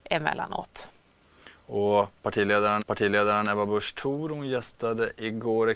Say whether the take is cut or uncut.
cut